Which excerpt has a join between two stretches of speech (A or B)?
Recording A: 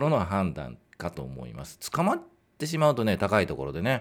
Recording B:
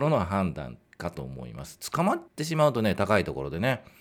B